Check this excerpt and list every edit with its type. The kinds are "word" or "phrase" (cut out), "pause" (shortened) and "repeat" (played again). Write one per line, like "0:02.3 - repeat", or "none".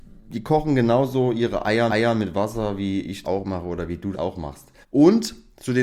0:01.9 - repeat
0:03.2 - word
0:04.1 - word
0:04.8 - pause